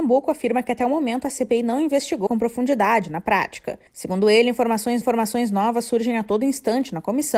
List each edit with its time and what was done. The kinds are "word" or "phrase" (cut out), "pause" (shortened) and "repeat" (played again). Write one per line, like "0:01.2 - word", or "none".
0:02.3 - phrase
0:03.9 - pause
0:05.0 - repeat

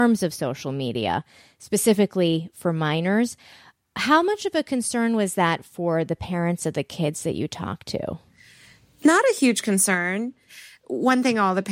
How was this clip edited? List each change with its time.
none

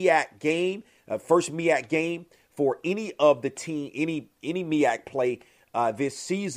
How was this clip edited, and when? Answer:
none

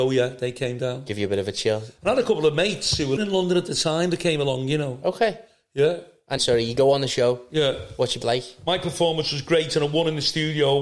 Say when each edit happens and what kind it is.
0:03.2 - word
0:06.4 - word
0:08.2 - word

